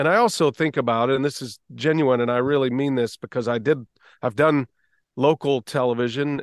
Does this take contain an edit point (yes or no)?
no